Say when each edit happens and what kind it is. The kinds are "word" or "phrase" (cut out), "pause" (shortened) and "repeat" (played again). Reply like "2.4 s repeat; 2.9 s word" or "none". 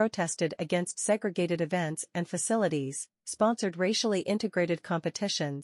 none